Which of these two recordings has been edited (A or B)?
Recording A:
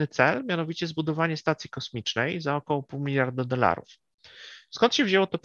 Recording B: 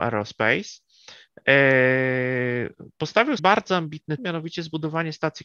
B